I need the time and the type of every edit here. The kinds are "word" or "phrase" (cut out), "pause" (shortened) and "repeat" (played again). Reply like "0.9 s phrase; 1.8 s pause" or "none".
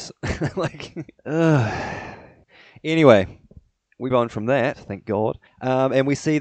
1.2 s pause; 4.1 s word; 5.5 s pause

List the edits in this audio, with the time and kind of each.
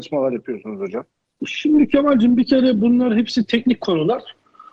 none

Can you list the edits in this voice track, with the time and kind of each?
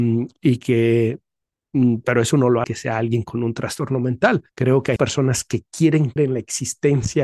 2.0 s phrase; 2.6 s word; 4.5 s pause; 5.0 s word; 6.2 s word

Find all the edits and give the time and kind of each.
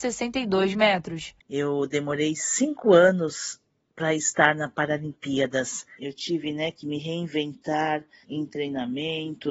8.2 s word

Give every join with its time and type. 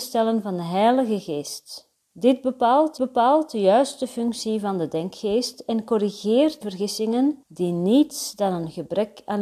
2.0 s pause; 3.0 s repeat; 6.6 s word; 7.4 s pause

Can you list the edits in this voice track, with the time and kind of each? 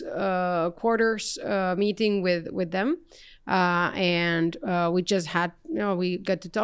none

